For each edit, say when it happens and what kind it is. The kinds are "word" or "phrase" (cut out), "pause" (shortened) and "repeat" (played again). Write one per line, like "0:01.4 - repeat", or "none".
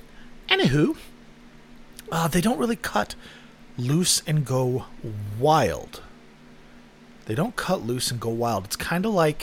none